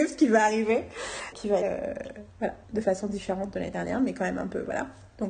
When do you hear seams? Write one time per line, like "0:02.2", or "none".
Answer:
0:01.3
0:01.6
0:02.6